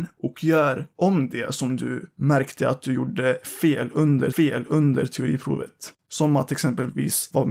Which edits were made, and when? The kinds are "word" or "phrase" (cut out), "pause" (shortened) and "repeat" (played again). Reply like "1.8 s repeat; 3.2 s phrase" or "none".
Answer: 4.3 s repeat